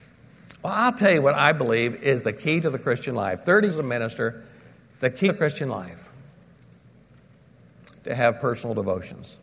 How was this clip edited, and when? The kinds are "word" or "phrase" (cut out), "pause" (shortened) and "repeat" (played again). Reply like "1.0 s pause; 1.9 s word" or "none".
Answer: 3.7 s word; 5.2 s word